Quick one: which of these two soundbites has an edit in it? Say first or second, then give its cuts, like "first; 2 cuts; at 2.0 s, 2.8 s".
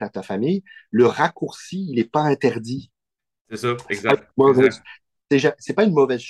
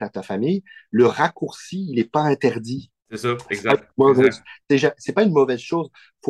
second; 2 cuts; at 3.0 s, 4.6 s